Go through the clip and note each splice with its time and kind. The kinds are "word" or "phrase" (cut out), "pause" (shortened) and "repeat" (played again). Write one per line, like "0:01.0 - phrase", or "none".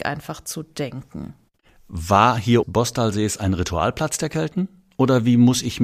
0:02.6 - phrase